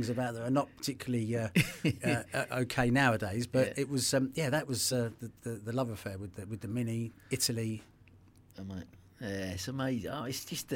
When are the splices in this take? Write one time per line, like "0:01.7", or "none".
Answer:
none